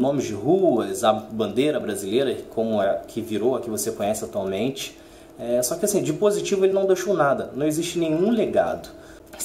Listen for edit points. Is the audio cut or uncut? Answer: uncut